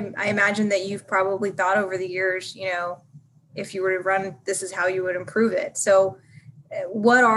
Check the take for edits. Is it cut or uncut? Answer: uncut